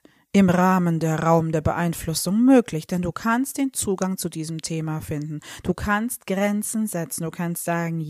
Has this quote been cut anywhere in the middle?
no; 0 cuts

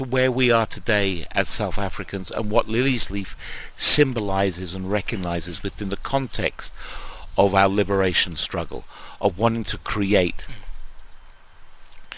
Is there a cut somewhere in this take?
no; 0 cuts

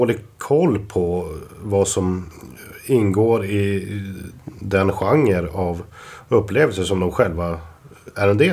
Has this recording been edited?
no; 0 cuts

